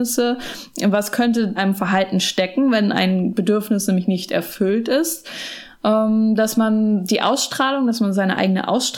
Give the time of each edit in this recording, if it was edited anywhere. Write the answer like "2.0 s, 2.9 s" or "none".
1.6 s

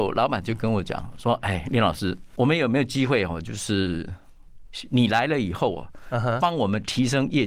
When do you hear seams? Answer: 2.4 s

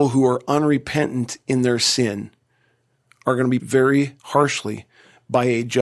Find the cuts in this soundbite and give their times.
3.6 s, 4.2 s

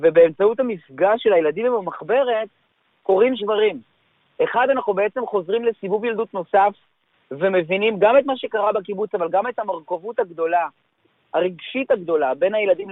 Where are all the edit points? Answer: 3.4 s

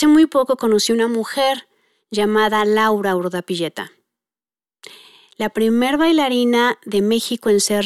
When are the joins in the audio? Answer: none

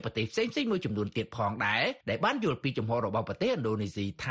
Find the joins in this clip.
2.0 s

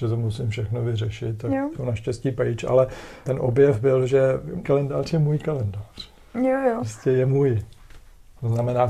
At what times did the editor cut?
1.7 s, 3.2 s, 4.6 s

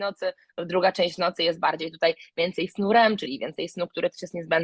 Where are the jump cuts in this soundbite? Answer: none

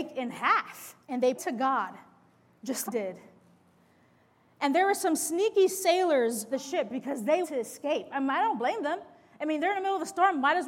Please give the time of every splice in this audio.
1.0 s, 1.3 s, 2.9 s, 6.5 s, 7.4 s

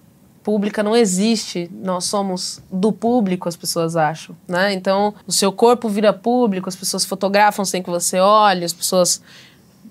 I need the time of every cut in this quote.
4.4 s, 5.2 s

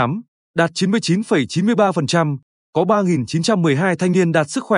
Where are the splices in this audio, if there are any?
none

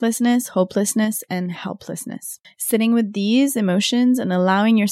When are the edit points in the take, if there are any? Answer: 2.4 s

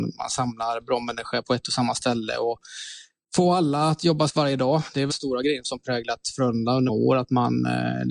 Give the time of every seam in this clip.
1.4 s, 4.3 s, 5.1 s, 5.6 s, 6.9 s

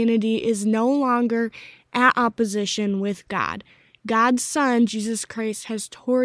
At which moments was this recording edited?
none

